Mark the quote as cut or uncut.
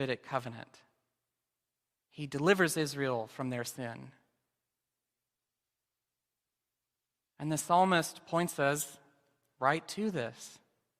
uncut